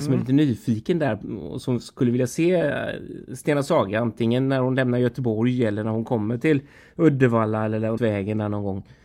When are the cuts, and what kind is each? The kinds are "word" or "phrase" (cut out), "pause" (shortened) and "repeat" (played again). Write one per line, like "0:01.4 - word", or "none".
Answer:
0:08.0 - word